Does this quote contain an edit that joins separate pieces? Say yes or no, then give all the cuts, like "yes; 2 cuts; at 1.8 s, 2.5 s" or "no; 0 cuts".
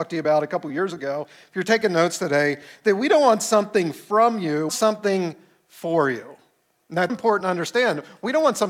yes; 2 cuts; at 4.7 s, 7.1 s